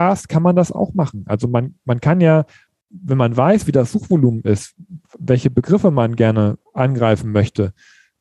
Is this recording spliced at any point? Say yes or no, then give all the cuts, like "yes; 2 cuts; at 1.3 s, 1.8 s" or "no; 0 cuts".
no; 0 cuts